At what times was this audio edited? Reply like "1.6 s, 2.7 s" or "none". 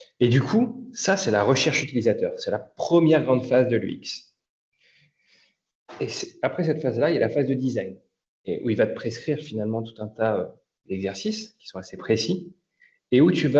none